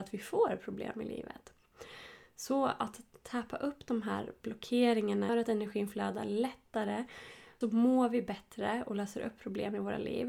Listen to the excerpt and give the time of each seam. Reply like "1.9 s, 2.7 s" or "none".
5.3 s, 7.6 s